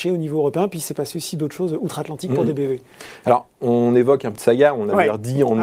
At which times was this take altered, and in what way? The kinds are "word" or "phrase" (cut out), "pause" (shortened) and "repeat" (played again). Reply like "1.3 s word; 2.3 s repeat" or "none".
4.4 s word

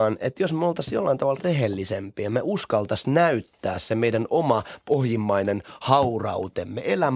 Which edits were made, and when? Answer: none

